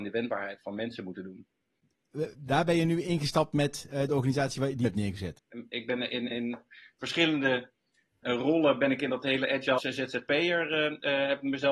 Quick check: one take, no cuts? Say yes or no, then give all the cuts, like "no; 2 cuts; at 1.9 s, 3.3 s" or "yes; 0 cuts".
no; 4 cuts; at 4.8 s, 6.3 s, 8.2 s, 9.8 s